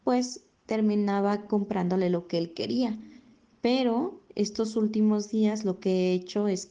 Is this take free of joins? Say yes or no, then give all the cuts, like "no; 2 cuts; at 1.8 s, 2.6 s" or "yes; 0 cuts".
yes; 0 cuts